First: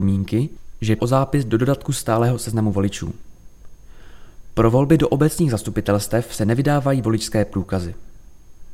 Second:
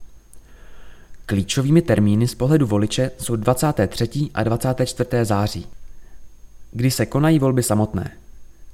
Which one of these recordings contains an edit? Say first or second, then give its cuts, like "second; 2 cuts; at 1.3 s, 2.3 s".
first; 1 cut; at 1.0 s